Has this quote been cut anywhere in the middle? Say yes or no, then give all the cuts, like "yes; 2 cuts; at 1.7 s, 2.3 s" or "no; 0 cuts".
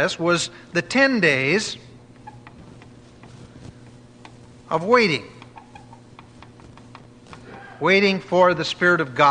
no; 0 cuts